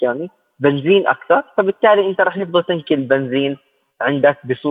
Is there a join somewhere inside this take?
no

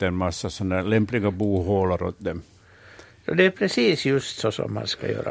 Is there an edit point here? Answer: no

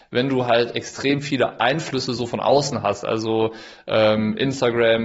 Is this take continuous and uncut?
yes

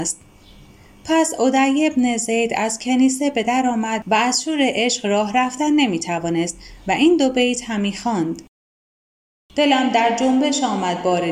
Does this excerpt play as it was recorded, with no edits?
yes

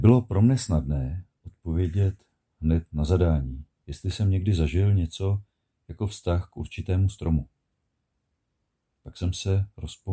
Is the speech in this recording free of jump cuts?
yes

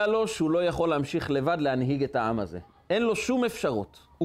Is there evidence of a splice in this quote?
no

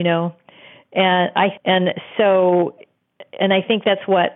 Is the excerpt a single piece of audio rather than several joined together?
no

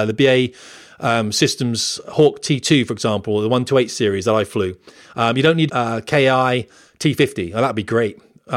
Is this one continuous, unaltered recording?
no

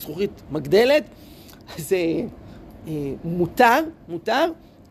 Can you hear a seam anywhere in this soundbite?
no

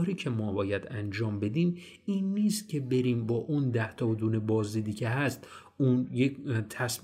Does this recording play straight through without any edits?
yes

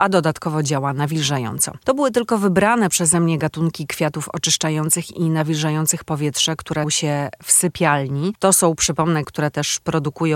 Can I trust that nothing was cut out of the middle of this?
no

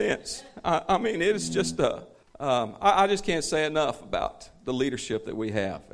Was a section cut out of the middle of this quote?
yes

